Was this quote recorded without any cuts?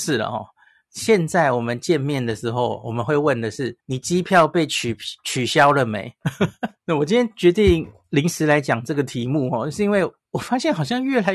no; 2 cuts; at 3.8 s, 6.8 s

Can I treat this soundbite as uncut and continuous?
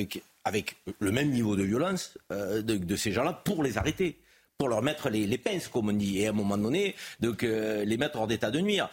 yes; 0 cuts

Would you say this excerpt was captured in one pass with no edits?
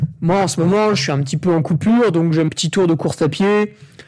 no; 1 cut; at 2.5 s

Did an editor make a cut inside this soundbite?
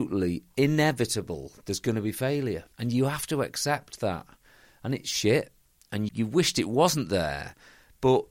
yes; 2 cuts; at 2.7 s, 6.1 s

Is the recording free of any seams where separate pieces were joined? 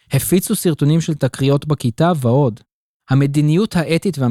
yes; 0 cuts

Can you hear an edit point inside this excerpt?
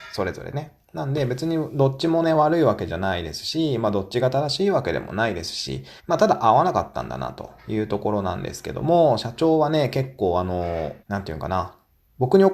yes; 3 cuts; at 6.0 s, 7.6 s, 11.0 s

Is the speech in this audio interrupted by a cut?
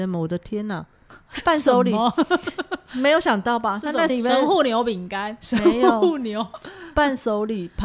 yes; 1 cut; at 4.1 s

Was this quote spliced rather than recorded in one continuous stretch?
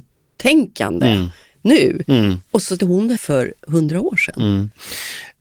yes; 2 cuts; at 2.8 s, 3.2 s

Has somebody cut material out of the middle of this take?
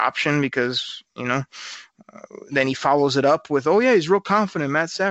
no; 0 cuts

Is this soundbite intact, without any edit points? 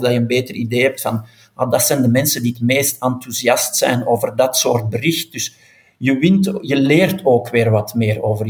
yes; 0 cuts

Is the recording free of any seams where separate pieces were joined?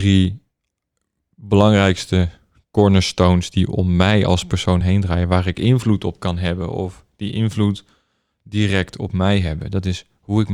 yes; 0 cuts

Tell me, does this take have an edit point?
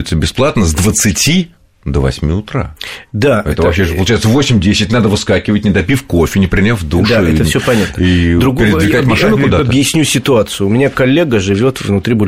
no; 0 cuts

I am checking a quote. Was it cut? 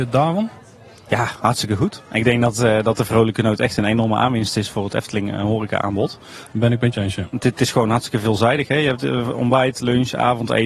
no; 0 cuts

